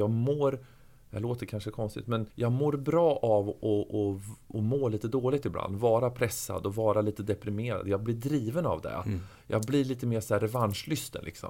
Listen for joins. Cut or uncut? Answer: cut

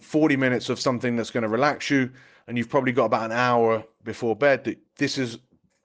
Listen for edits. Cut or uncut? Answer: uncut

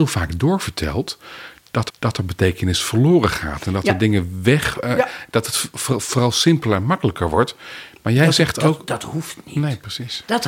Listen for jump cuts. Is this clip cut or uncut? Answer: cut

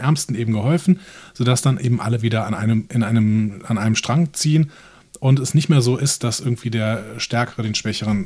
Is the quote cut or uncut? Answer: uncut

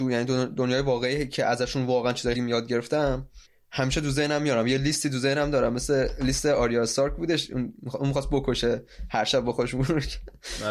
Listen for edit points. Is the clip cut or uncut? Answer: cut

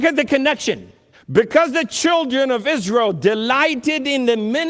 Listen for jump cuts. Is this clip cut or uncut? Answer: cut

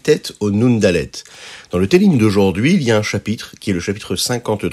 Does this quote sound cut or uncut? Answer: uncut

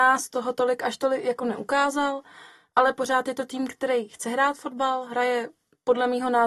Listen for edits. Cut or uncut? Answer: uncut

